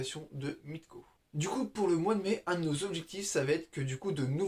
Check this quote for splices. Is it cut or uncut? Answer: uncut